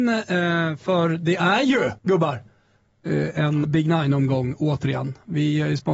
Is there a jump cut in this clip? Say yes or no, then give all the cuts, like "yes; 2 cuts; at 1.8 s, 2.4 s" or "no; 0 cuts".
yes; 2 cuts; at 2.0 s, 3.6 s